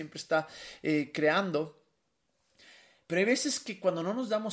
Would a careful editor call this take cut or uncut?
uncut